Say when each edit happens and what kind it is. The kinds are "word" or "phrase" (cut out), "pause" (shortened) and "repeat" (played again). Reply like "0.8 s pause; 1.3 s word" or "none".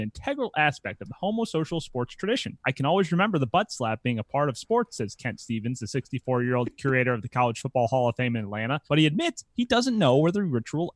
2.6 s pause; 8.9 s pause

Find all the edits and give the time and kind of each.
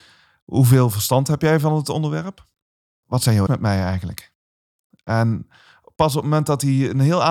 3.5 s word

